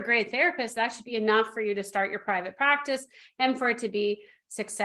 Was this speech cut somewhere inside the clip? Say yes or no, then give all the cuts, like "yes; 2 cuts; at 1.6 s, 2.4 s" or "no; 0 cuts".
no; 0 cuts